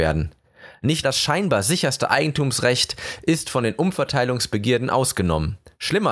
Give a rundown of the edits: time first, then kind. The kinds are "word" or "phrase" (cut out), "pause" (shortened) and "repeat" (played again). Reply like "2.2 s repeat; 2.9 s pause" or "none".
1.0 s word